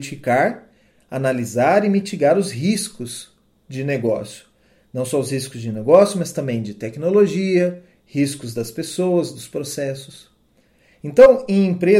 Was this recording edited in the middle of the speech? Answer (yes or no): no